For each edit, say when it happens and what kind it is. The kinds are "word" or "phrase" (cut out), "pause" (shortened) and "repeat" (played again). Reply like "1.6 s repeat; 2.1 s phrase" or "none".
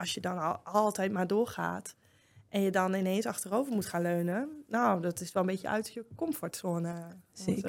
none